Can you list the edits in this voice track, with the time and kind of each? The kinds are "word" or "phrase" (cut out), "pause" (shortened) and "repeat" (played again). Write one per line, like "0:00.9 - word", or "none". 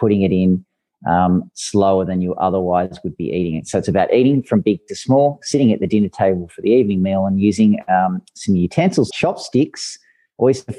0:09.1 - word